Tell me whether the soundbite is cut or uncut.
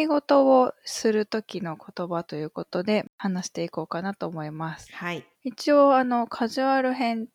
cut